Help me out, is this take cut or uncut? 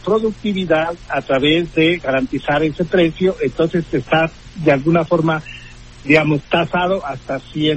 uncut